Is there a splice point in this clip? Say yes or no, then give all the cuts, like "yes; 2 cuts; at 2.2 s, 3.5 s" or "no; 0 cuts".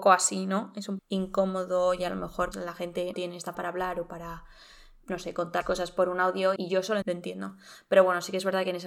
yes; 7 cuts; at 1.0 s, 2.5 s, 3.1 s, 3.5 s, 5.6 s, 6.6 s, 7.0 s